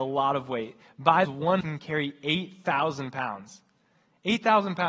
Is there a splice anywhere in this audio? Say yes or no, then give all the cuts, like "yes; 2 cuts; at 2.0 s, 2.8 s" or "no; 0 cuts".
yes; 2 cuts; at 1.2 s, 1.6 s